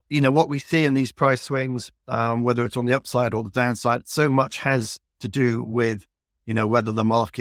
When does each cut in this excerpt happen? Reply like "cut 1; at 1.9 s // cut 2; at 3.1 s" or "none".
none